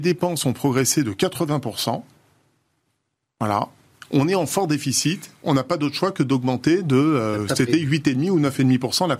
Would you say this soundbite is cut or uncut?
uncut